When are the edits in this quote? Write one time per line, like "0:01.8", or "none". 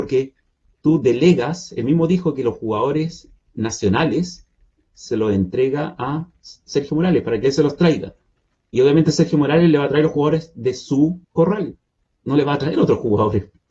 0:11.2